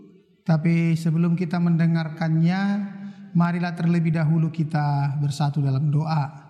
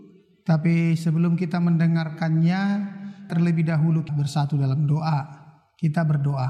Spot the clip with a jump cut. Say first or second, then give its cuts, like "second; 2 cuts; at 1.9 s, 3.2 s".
second; 2 cuts; at 3.3 s, 4.1 s